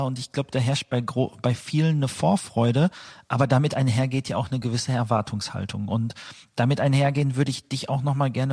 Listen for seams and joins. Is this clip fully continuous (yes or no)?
yes